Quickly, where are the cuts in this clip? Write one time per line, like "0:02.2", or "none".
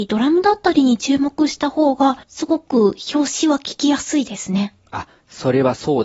0:02.2